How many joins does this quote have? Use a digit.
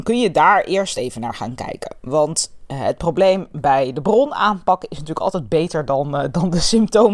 0